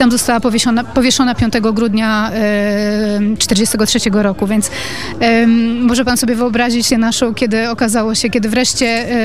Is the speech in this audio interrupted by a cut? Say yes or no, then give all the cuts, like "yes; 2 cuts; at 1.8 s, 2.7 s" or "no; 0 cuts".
yes; 1 cut; at 6.9 s